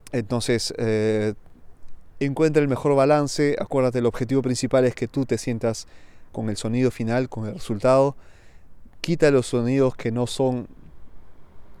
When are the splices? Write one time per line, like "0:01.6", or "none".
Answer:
0:06.3